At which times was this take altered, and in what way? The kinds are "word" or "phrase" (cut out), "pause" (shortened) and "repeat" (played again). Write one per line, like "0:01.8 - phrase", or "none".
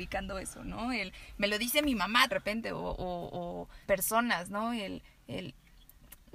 0:02.3 - phrase
0:03.8 - pause